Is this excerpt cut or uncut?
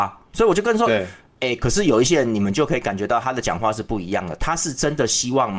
uncut